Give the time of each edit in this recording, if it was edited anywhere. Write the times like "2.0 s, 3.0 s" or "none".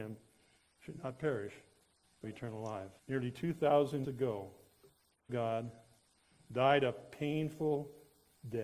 2.2 s, 3.0 s, 4.0 s, 5.3 s

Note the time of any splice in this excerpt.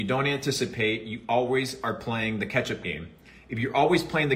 none

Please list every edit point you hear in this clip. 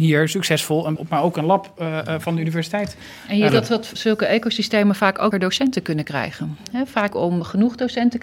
1.0 s, 3.5 s, 3.9 s, 5.3 s, 7.1 s

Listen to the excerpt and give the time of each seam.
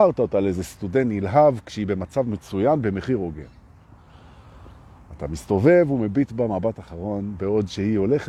none

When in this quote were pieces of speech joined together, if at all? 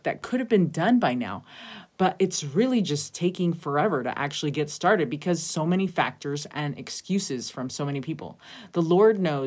none

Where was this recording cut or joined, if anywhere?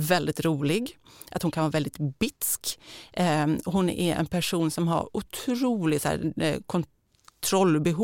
none

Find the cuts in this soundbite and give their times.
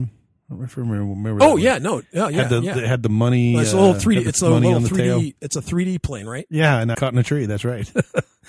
6.9 s

